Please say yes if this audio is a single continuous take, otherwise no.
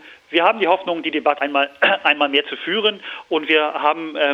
no